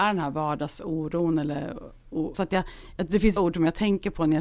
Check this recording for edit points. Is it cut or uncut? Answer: cut